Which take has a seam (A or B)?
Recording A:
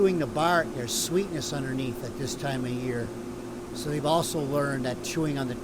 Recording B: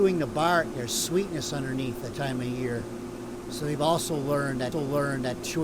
B